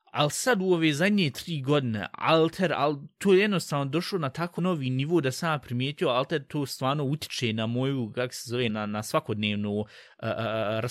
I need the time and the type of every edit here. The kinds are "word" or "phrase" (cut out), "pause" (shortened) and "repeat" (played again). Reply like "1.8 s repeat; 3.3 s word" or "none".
4.6 s word; 8.7 s word